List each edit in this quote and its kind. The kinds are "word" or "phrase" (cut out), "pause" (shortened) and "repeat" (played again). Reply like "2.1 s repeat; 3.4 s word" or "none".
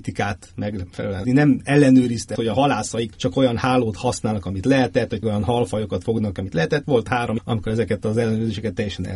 1.2 s word; 2.4 s word; 3.1 s word; 5.2 s word; 6.8 s word; 7.4 s word